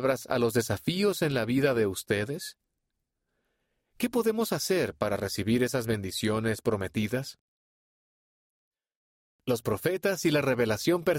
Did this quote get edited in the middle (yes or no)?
no